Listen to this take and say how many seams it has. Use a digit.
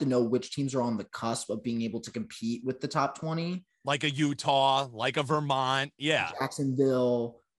0